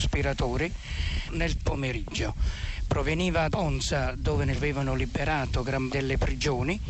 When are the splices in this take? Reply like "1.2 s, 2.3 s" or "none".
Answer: 1.3 s, 1.6 s, 3.5 s, 4.6 s, 5.9 s